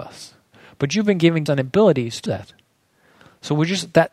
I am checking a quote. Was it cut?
yes; 2 cuts; at 1.5 s, 2.3 s

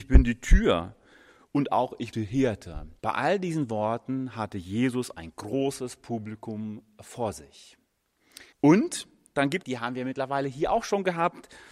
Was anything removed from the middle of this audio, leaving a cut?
yes; 4 cuts; at 2.1 s, 3.0 s, 8.5 s, 9.6 s

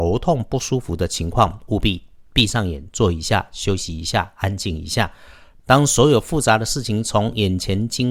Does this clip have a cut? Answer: no; 0 cuts

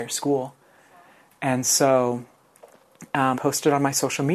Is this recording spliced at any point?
yes; 1 cut; at 3.3 s

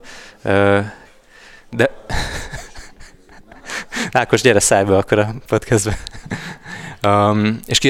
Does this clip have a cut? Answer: no; 0 cuts

